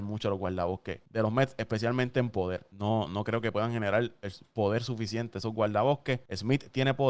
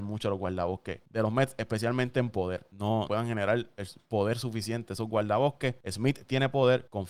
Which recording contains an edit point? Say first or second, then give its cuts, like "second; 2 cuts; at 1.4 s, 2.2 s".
second; 1 cut; at 3.1 s